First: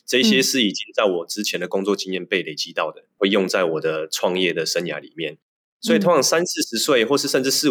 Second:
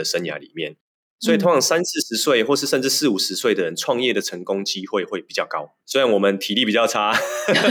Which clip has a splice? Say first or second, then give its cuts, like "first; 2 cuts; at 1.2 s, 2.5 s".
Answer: second; 1 cut; at 5.8 s